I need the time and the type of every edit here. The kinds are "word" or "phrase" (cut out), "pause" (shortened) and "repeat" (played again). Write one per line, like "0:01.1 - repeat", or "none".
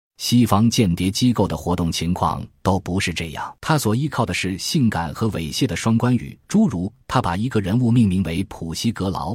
0:03.6 - pause
0:06.4 - pause